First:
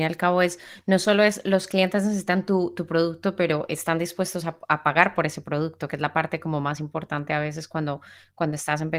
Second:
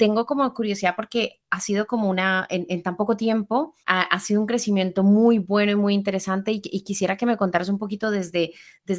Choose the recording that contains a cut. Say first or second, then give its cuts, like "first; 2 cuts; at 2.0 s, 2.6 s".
second; 1 cut; at 3.8 s